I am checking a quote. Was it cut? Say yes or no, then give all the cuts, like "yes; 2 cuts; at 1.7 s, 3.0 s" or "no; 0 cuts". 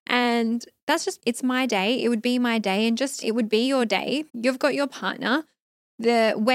yes; 3 cuts; at 1.2 s, 3.2 s, 4.3 s